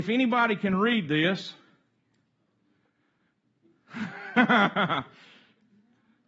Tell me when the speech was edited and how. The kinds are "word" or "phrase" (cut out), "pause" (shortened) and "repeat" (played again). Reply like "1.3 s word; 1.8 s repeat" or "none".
none